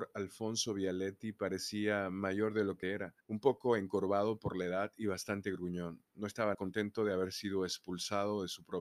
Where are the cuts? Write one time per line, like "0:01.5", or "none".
0:02.8
0:03.2
0:06.5

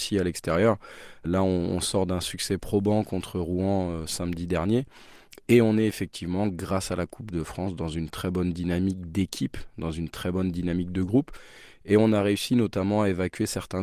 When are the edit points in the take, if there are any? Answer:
0:01.2

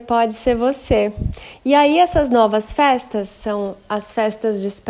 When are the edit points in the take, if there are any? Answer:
none

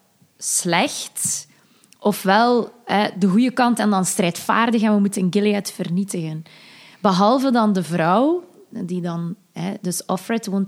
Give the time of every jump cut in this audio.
none

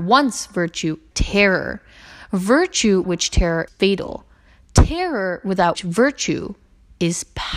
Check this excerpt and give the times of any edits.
0:01.1
0:03.0
0:03.7
0:05.7

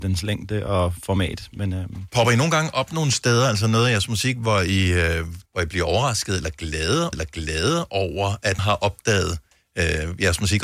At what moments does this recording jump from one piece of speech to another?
0:05.5
0:07.1
0:08.6

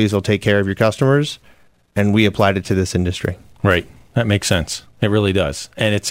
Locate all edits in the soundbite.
none

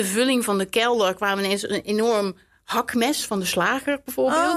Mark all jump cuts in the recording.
none

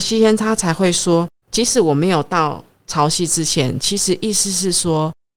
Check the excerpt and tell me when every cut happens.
0:01.4

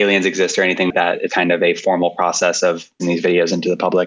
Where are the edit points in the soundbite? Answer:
0:00.9
0:01.3
0:03.0

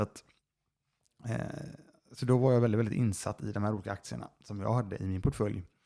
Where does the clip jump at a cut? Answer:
none

